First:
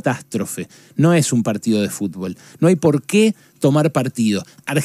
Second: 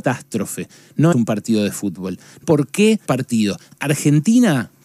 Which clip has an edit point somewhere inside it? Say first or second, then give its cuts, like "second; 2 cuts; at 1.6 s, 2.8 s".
second; 3 cuts; at 1.1 s, 2.4 s, 3.1 s